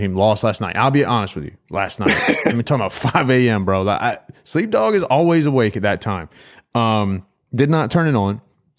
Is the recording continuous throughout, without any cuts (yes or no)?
yes